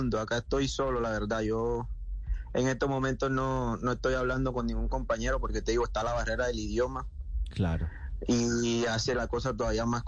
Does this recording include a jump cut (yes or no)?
no